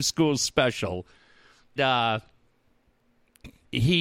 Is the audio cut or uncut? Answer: cut